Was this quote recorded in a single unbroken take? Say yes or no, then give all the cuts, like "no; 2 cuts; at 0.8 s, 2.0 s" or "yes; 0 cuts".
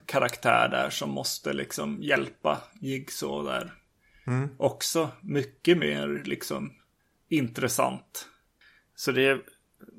yes; 0 cuts